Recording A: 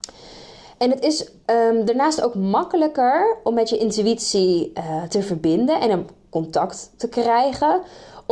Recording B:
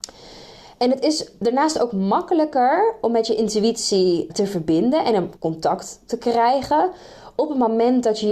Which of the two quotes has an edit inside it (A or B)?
B